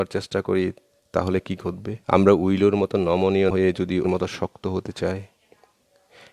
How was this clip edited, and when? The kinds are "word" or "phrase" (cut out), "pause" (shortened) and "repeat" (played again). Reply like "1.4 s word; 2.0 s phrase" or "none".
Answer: 2.0 s pause; 3.5 s word; 4.0 s word